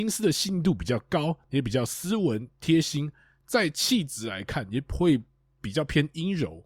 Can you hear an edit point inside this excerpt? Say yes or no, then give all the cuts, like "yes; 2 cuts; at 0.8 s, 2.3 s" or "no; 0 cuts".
no; 0 cuts